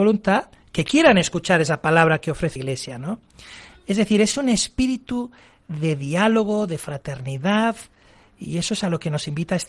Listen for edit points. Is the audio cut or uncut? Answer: cut